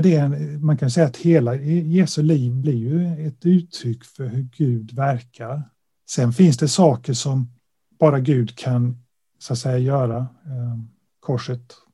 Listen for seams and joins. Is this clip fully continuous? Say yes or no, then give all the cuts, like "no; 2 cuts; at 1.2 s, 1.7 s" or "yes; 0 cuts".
yes; 0 cuts